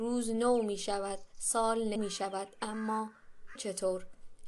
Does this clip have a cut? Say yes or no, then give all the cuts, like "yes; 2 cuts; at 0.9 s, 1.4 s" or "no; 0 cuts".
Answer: yes; 2 cuts; at 2.0 s, 3.6 s